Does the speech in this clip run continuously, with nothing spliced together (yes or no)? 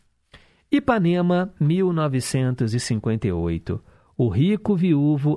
yes